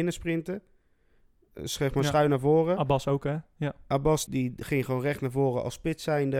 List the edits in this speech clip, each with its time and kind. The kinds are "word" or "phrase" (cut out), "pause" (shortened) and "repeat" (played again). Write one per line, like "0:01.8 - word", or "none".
0:04.3 - word

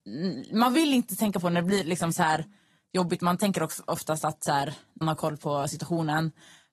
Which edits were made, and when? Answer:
0:05.0 - phrase

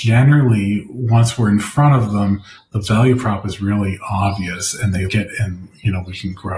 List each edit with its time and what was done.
0:05.1 - word

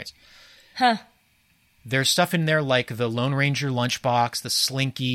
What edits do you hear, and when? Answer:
none

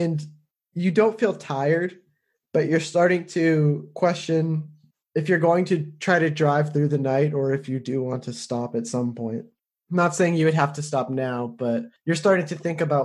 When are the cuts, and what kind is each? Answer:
none

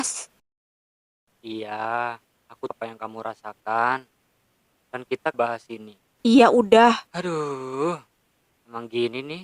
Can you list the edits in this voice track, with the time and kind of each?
0:02.7 - word
0:05.3 - phrase
0:07.1 - pause

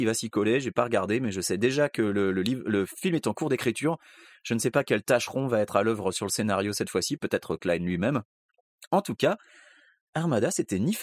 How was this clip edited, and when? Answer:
none

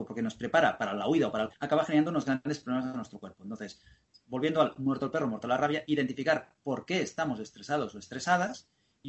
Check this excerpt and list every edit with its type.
0:01.5 - word

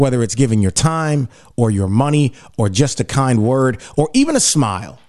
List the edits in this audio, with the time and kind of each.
none

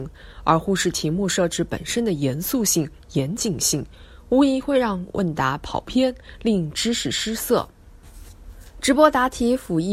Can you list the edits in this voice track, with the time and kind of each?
none

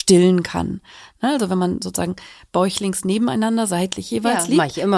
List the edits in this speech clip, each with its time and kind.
none

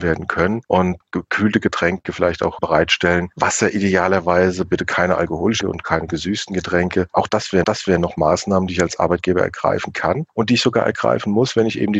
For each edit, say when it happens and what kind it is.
0:05.6 - word
0:07.6 - repeat

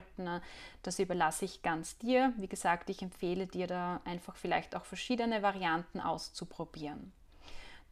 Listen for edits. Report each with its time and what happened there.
none

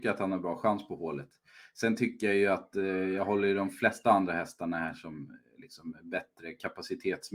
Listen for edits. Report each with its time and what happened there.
none

